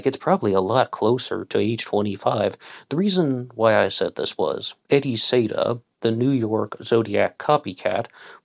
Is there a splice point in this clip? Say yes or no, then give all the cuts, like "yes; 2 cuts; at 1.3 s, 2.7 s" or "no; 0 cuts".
yes; 1 cut; at 4.8 s